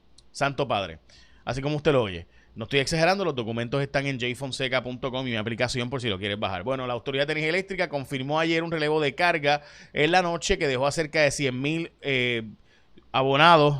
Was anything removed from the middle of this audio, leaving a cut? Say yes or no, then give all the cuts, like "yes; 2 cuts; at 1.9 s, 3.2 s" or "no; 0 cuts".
no; 0 cuts